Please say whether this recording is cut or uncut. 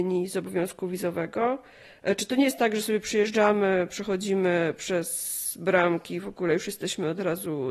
uncut